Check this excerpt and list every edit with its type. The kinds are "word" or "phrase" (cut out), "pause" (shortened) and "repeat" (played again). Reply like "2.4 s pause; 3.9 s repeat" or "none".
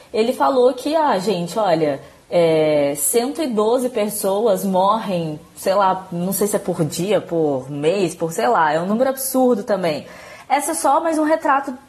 none